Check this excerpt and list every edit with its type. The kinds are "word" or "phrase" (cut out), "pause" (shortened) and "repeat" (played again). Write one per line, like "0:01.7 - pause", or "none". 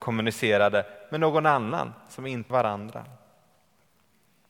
0:02.5 - phrase